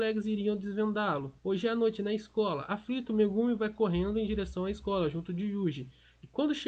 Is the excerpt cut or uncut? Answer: cut